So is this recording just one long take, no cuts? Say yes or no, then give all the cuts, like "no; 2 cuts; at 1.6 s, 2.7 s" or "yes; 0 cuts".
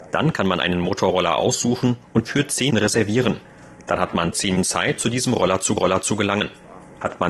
no; 5 cuts; at 2.3 s, 2.7 s, 4.6 s, 5.0 s, 5.8 s